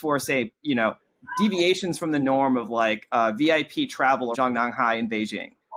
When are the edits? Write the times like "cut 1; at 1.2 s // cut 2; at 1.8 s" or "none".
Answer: cut 1; at 4.3 s